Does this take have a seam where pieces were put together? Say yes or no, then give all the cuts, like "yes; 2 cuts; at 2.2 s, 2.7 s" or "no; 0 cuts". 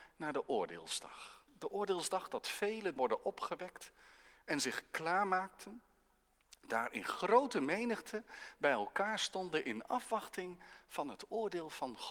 yes; 1 cut; at 3.0 s